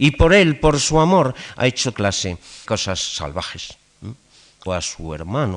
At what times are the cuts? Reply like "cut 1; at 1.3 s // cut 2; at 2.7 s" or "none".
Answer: cut 1; at 1.9 s // cut 2; at 2.6 s // cut 3; at 4.7 s